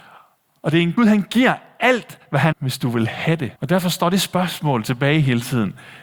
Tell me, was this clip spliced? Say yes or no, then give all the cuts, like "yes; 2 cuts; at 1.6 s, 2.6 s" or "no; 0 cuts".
yes; 3 cuts; at 1.0 s, 2.5 s, 3.6 s